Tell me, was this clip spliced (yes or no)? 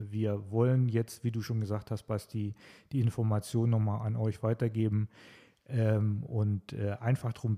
no